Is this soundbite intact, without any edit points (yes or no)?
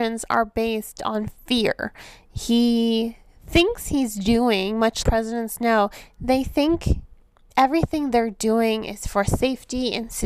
no